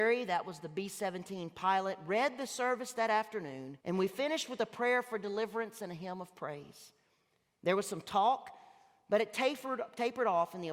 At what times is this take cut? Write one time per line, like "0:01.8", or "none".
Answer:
0:03.8